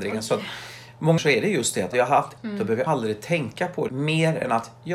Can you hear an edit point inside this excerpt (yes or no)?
yes